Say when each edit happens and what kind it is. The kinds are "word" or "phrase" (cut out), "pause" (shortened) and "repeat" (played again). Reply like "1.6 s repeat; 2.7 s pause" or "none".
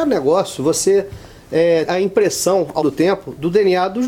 1.8 s word; 2.8 s word